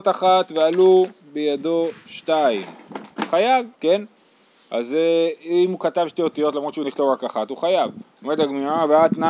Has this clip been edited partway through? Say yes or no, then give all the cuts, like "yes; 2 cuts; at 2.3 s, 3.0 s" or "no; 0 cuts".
yes; 3 cuts; at 1.2 s, 3.7 s, 6.8 s